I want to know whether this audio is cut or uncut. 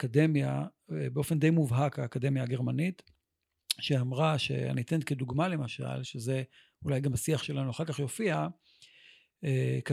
uncut